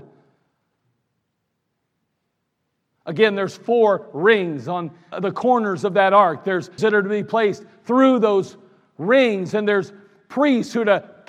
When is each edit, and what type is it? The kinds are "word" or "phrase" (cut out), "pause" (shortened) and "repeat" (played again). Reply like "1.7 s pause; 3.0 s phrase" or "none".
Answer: 5.1 s word; 6.8 s word